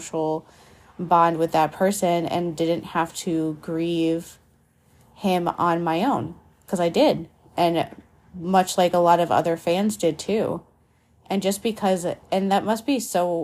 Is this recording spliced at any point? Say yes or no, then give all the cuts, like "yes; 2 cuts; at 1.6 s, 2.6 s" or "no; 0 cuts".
no; 0 cuts